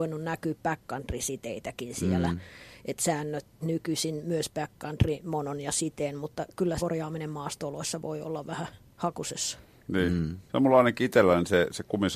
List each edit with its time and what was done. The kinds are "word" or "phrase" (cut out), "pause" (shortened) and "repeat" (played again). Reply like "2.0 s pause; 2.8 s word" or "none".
3.6 s word; 6.8 s word; 10.5 s pause